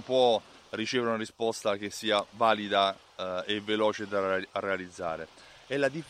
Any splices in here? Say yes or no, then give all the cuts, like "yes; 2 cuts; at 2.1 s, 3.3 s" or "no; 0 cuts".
no; 0 cuts